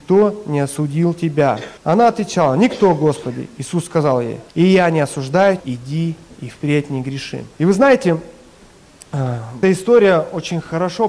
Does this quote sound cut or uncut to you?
cut